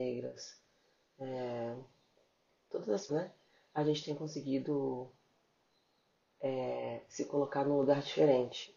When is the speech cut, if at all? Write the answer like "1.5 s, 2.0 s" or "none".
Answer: 3.1 s